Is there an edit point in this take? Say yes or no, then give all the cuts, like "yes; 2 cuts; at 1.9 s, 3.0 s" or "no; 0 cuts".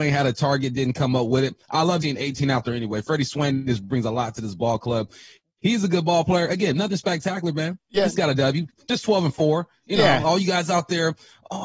yes; 1 cut; at 2.0 s